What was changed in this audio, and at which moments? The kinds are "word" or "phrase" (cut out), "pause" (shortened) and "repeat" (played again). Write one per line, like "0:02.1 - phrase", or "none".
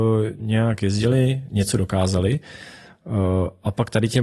none

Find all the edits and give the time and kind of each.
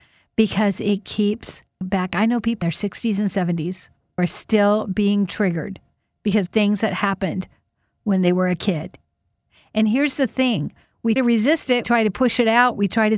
0:01.8 - word
0:02.6 - word
0:04.2 - word
0:06.5 - word
0:11.2 - word
0:11.8 - word

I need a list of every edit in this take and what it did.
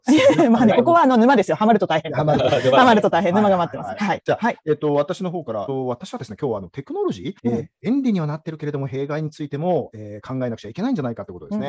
0:07.4 - pause

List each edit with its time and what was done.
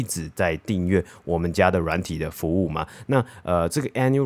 none

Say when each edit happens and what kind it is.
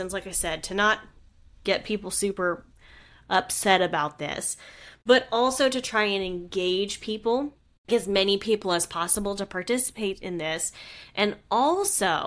0:07.9 - word

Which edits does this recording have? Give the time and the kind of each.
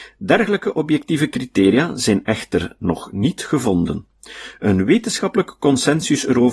none

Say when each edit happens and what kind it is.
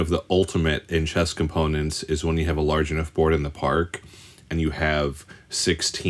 none

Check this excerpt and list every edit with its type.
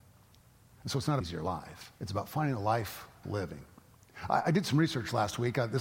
0:01.2 - phrase
0:02.0 - pause
0:03.2 - word

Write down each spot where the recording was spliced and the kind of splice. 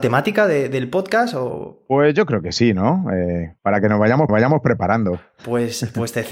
0:03.6 - pause
0:04.3 - repeat

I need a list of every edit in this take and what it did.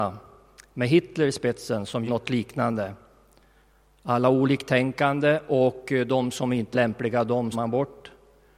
0:02.1 - word
0:06.7 - word
0:07.5 - word

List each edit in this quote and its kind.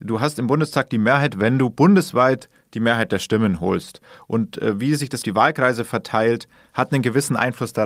0:05.2 - word

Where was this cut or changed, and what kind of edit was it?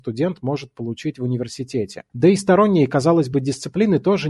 none

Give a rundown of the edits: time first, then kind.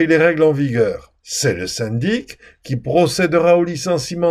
0:01.2 - pause

